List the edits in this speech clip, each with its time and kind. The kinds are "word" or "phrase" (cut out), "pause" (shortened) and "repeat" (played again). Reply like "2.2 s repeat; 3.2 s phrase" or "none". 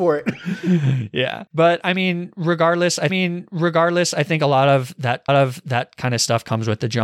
1.5 s pause; 3.1 s repeat; 5.3 s repeat